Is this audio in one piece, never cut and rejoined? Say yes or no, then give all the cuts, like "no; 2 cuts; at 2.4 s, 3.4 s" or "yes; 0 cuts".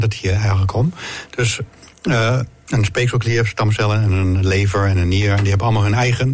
yes; 0 cuts